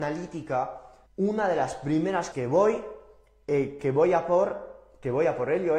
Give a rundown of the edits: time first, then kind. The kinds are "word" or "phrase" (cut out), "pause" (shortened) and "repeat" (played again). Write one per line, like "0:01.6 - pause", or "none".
0:01.1 - pause
0:02.3 - word